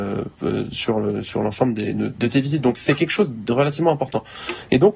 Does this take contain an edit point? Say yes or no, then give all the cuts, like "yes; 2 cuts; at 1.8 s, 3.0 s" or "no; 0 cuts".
no; 0 cuts